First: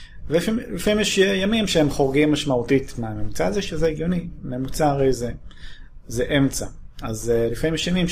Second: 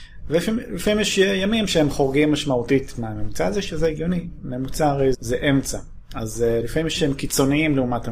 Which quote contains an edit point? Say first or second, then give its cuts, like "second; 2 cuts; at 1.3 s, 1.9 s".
second; 2 cuts; at 5.1 s, 7.0 s